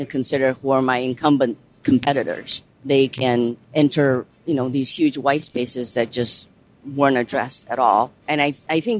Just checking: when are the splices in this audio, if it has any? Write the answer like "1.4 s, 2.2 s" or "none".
2.7 s, 3.6 s